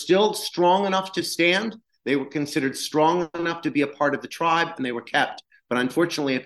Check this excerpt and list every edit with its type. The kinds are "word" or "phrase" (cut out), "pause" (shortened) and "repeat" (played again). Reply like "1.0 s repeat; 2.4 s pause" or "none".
none